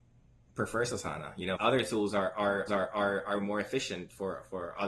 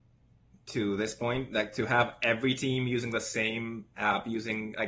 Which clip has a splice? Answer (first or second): first